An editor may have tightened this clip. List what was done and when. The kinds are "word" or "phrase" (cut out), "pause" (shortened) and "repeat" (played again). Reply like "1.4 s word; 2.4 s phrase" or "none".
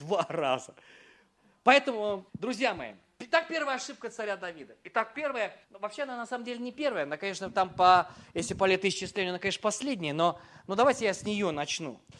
2.3 s pause; 5.6 s pause

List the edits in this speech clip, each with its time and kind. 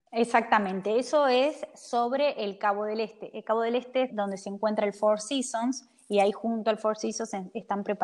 4.1 s word

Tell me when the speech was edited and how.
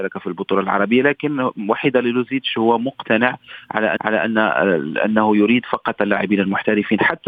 4.0 s repeat

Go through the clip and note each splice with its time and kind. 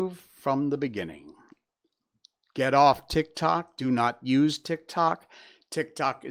none

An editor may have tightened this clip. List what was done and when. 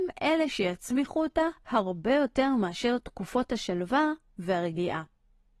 none

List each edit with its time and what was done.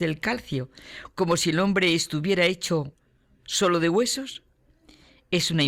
none

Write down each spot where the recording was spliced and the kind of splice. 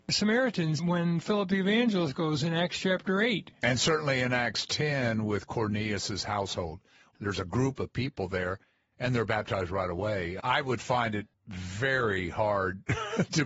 none

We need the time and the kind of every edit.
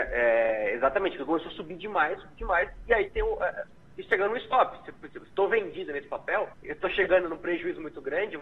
6.5 s pause

